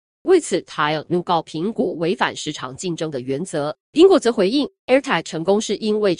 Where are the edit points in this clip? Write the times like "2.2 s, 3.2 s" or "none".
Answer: 3.8 s, 4.8 s